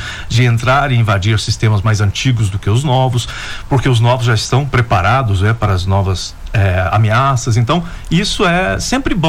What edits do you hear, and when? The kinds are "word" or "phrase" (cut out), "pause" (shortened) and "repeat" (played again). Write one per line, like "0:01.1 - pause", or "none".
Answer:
none